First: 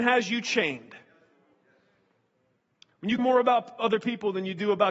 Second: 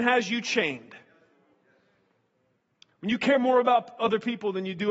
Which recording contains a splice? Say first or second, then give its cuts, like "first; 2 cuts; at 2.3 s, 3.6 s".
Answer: first; 1 cut; at 3.2 s